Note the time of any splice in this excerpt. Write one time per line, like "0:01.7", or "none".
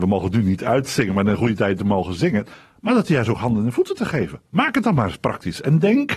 none